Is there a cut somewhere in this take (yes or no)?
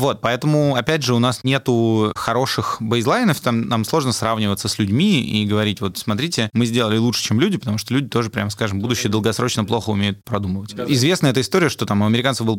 no